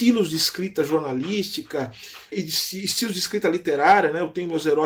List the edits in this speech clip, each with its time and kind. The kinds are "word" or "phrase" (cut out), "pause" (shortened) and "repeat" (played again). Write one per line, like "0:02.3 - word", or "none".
0:02.3 - word